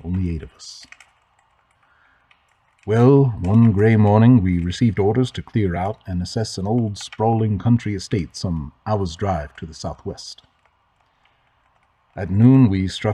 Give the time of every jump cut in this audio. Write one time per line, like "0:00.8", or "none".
none